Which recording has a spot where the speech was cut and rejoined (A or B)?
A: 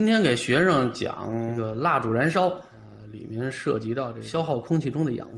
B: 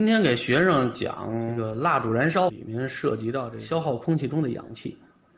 B